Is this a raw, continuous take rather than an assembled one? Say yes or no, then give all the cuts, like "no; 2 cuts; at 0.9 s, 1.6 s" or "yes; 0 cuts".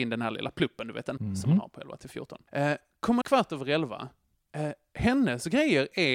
no; 3 cuts; at 1.2 s, 2.5 s, 3.2 s